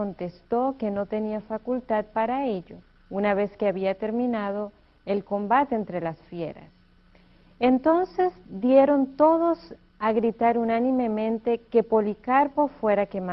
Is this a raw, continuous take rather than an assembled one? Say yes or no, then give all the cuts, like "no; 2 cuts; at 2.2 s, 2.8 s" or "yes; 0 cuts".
yes; 0 cuts